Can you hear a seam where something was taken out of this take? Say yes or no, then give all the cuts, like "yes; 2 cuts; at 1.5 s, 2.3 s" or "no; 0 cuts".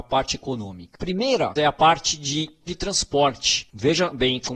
yes; 2 cuts; at 1.6 s, 2.7 s